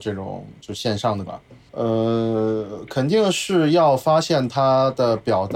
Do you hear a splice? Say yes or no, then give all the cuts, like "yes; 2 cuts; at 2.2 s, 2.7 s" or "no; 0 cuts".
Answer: yes; 2 cuts; at 1.3 s, 1.7 s